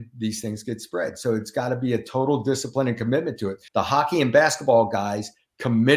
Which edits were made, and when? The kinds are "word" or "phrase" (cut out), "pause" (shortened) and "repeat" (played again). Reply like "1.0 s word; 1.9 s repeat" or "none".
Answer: 3.7 s pause